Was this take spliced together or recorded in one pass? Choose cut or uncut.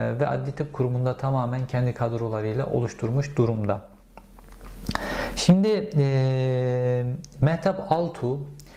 uncut